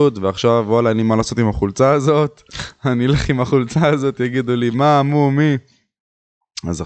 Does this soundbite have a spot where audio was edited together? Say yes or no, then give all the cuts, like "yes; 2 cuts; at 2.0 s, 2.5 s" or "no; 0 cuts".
no; 0 cuts